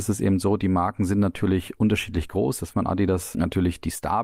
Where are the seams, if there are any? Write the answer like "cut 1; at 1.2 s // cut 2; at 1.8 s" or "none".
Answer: cut 1; at 2.7 s // cut 2; at 3.3 s